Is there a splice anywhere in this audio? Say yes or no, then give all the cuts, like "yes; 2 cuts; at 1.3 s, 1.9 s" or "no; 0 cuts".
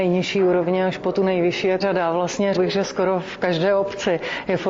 yes; 2 cuts; at 1.8 s, 2.5 s